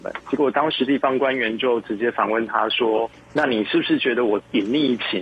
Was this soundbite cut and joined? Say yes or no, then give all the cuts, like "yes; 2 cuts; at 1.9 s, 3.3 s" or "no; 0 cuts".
no; 0 cuts